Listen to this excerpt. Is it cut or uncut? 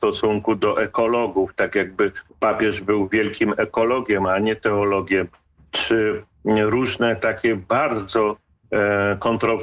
cut